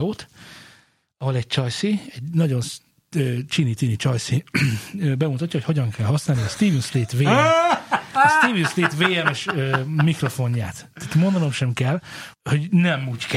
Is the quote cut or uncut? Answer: cut